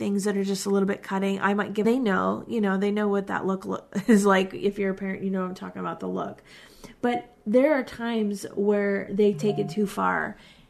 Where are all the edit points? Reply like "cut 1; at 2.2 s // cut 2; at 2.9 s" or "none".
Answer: cut 1; at 1.8 s